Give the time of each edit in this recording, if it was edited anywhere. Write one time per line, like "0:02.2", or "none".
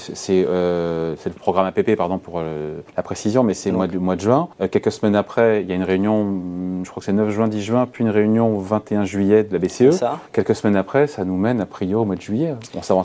0:02.9
0:04.5
0:10.3